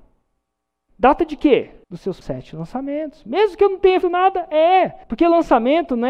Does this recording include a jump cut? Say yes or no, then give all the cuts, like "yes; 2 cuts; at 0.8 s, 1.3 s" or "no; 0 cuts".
yes; 4 cuts; at 1.8 s, 2.2 s, 4.0 s, 5.0 s